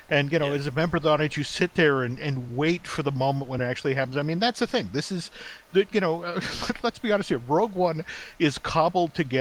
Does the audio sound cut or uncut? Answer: uncut